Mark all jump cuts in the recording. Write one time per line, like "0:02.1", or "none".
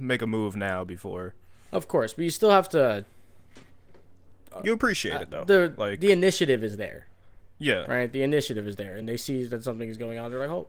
none

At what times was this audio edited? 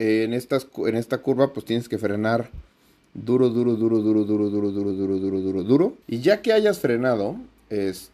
0:06.0

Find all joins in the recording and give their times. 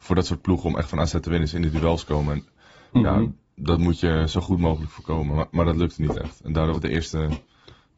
0:06.7

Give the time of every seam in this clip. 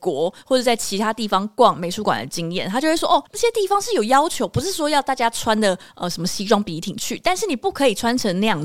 0:03.3

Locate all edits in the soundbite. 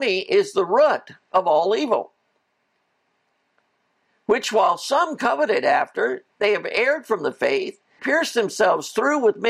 0:08.0

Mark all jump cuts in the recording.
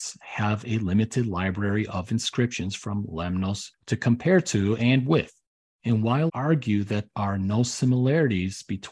0:06.3
0:07.1

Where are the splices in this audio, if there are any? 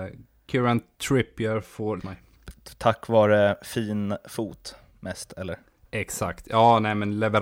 0:02.0

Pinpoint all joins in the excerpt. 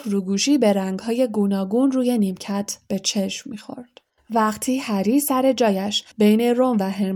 0:04.2
0:06.1

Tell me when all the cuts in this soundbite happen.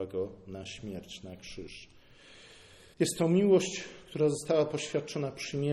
0:02.9

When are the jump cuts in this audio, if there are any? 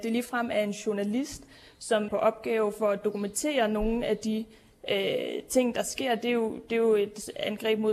0:02.1

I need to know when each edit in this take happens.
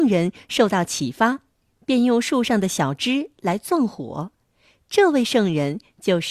none

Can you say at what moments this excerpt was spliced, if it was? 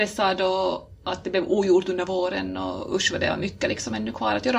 none

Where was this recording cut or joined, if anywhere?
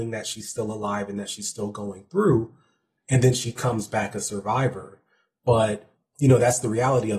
none

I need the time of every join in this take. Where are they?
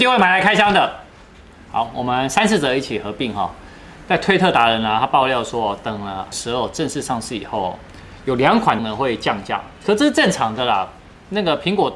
0:06.3
0:08.8

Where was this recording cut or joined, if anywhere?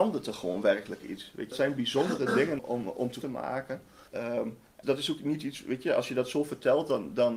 0:01.5
0:02.6
0:03.2
0:04.1
0:04.8

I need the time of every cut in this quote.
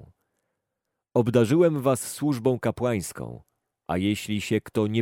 none

